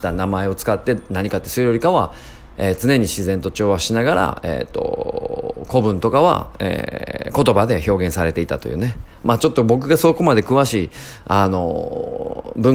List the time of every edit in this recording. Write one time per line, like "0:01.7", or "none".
none